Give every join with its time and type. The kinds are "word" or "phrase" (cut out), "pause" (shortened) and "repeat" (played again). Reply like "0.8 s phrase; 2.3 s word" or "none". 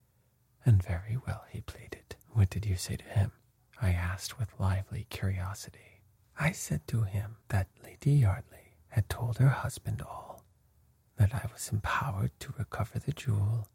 2.2 s pause; 3.6 s pause; 6.2 s pause; 7.4 s pause